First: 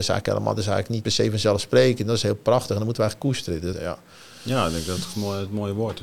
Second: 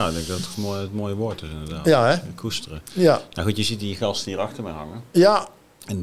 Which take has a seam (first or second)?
first